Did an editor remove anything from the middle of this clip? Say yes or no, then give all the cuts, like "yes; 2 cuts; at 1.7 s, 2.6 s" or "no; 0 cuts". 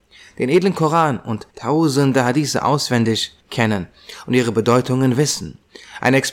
yes; 2 cuts; at 1.5 s, 3.4 s